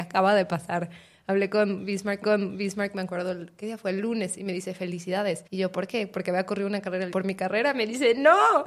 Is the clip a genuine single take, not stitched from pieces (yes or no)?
no